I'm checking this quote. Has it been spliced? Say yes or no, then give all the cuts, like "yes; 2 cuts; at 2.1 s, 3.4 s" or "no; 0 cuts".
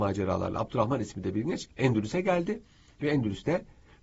no; 0 cuts